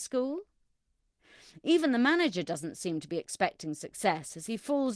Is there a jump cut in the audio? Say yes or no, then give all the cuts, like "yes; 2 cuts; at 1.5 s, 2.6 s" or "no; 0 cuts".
no; 0 cuts